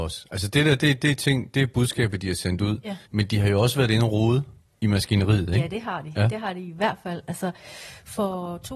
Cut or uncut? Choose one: cut